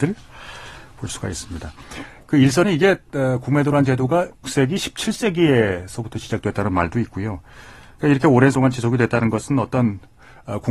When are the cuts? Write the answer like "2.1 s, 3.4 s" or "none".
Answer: 2.6 s, 4.4 s, 8.5 s